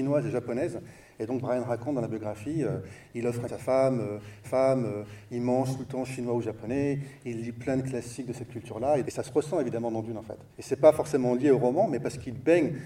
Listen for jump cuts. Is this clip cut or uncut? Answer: cut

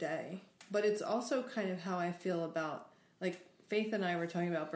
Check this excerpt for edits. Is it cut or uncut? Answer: uncut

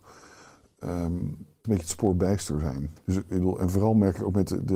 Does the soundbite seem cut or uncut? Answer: cut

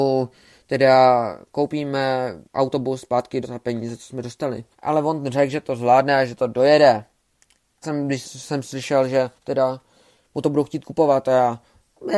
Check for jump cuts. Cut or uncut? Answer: cut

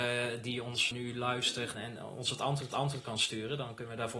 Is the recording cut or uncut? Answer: cut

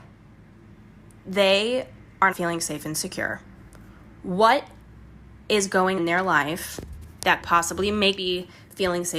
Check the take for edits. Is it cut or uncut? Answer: cut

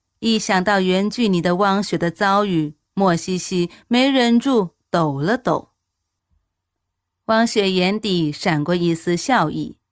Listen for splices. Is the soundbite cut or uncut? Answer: uncut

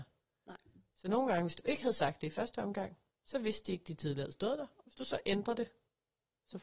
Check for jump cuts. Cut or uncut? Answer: uncut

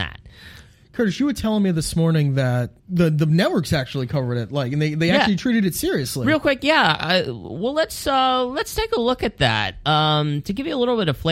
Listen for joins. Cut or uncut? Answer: cut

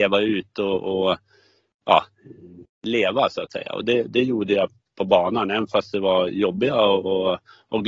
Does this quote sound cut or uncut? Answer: uncut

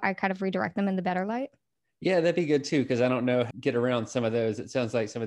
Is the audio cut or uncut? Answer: cut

